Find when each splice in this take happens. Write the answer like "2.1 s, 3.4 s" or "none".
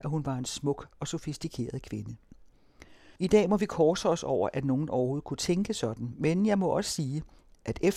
3.2 s